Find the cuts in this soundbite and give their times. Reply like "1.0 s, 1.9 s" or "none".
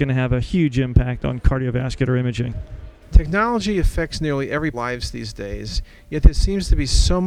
4.7 s

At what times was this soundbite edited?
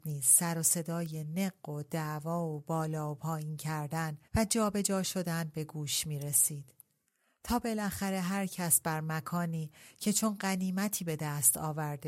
4.2 s

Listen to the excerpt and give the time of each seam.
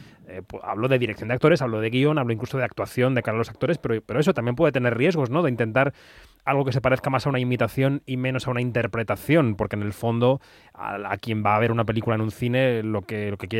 none

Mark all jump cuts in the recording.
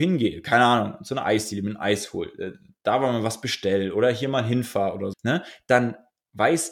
5.1 s

